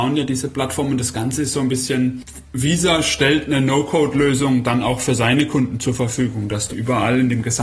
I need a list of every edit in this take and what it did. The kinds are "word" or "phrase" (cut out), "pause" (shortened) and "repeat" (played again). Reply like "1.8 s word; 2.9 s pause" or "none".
6.7 s phrase